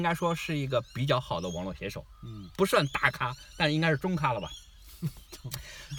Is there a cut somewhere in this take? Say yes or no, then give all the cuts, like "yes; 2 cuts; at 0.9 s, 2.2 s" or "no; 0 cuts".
no; 0 cuts